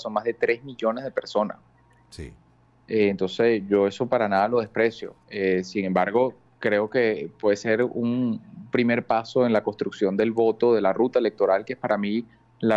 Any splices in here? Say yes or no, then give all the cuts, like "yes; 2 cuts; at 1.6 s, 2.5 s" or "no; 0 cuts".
no; 0 cuts